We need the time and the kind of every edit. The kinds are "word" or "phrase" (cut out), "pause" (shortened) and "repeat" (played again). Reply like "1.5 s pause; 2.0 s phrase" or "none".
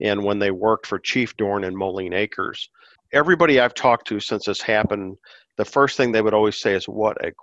none